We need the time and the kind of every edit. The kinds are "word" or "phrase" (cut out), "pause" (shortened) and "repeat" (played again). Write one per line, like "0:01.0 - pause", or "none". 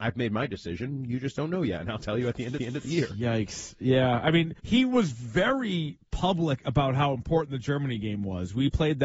0:02.6 - repeat
0:04.6 - pause